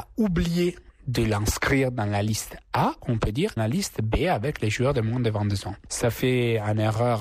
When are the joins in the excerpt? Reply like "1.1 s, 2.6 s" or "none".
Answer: 3.6 s